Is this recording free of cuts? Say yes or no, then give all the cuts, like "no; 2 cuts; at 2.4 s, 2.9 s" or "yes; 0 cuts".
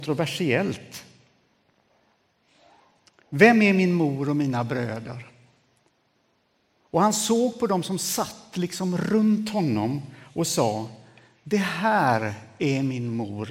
yes; 0 cuts